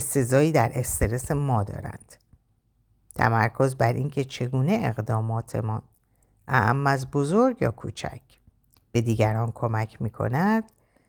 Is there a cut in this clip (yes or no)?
no